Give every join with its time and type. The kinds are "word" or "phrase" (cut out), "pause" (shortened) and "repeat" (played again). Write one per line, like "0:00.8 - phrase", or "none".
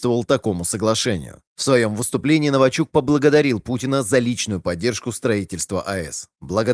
none